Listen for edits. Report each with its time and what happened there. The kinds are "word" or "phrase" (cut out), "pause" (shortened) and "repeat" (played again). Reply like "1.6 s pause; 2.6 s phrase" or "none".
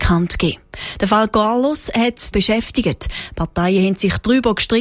2.3 s phrase